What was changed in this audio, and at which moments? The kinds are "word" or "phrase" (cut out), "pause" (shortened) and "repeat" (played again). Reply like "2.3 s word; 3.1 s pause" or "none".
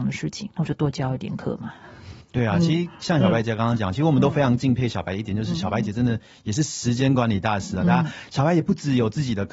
none